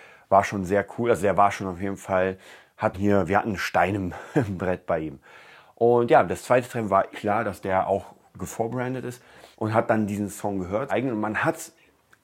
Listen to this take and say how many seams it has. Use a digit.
4